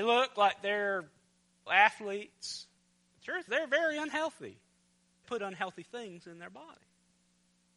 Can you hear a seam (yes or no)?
yes